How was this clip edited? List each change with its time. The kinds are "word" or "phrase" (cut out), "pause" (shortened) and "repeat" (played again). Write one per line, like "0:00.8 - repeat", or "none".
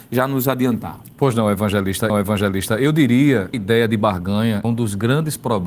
0:02.1 - repeat
0:03.5 - phrase
0:04.6 - word